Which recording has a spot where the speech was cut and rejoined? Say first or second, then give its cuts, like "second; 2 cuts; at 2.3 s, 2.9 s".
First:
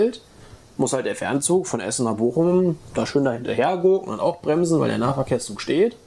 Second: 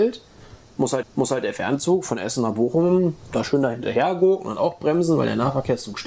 second; 1 cut; at 1.0 s